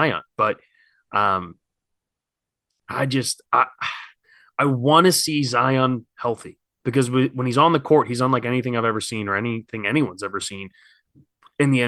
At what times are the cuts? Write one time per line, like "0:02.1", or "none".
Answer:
none